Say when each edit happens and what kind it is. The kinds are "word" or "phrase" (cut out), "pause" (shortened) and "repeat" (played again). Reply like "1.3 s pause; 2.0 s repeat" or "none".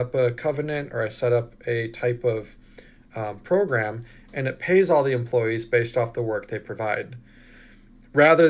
none